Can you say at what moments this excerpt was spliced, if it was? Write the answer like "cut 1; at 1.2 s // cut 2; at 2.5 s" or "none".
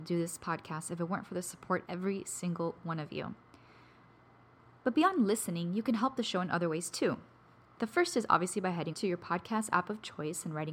cut 1; at 1.8 s // cut 2; at 8.9 s